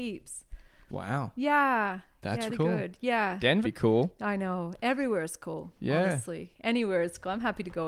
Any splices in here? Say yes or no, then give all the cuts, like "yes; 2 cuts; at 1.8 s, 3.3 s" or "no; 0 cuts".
yes; 2 cuts; at 2.5 s, 3.6 s